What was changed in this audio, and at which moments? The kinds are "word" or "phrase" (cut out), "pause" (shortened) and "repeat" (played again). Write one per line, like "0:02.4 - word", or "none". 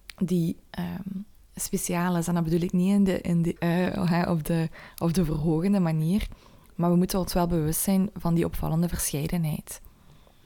0:03.6 - word